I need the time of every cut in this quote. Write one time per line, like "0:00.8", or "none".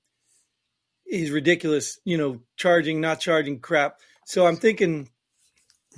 none